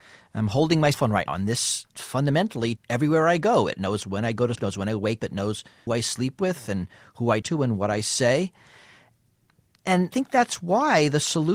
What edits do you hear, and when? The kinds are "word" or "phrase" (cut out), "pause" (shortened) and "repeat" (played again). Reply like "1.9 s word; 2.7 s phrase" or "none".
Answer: 0.9 s word; 1.3 s word; 2.8 s word; 4.5 s word; 5.2 s word; 5.9 s word; 7.4 s word; 10.1 s word